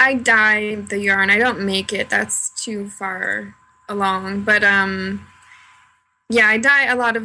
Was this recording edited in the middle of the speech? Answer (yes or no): no